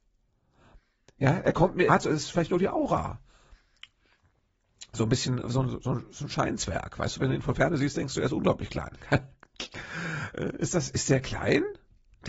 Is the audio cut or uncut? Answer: cut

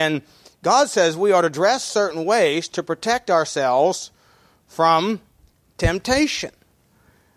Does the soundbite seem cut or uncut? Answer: uncut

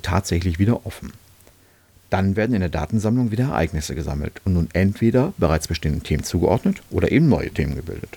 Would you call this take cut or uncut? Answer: uncut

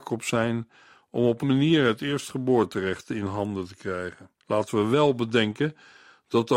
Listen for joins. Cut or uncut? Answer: cut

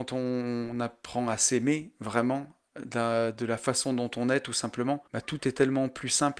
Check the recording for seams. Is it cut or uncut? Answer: cut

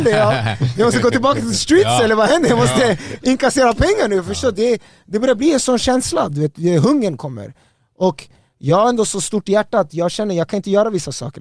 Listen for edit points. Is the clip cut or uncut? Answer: uncut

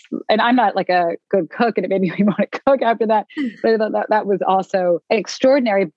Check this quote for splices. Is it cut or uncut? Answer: cut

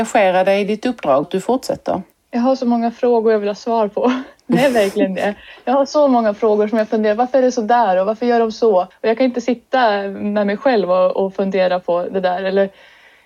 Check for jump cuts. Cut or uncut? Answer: cut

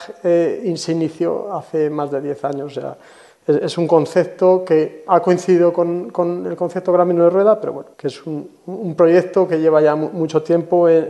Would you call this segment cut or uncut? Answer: cut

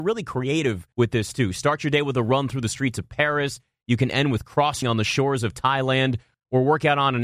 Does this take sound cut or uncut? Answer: cut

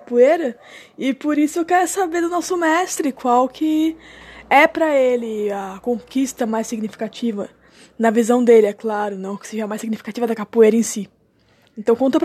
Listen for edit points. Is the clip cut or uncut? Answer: uncut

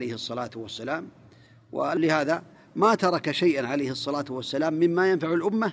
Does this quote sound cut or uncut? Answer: uncut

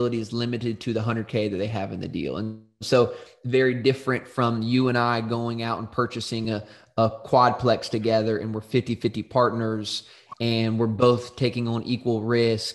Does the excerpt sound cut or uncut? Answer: uncut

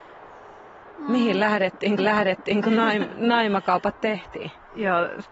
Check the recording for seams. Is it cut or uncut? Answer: cut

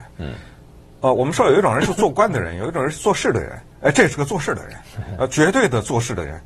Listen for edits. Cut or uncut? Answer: uncut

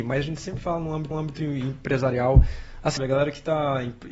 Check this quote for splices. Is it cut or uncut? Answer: cut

